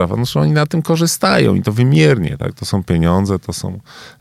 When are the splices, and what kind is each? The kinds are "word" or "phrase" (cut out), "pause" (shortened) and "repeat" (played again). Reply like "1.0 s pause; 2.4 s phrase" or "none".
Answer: none